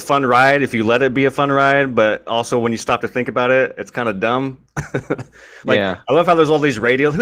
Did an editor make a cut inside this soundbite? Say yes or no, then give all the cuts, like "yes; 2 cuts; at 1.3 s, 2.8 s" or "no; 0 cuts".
no; 0 cuts